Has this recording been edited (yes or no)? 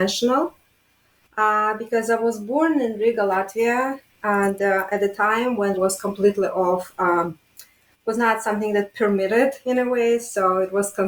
yes